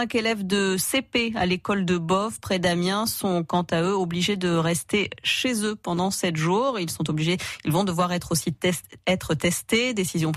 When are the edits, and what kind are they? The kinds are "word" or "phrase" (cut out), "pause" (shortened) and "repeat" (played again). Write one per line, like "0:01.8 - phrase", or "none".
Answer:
none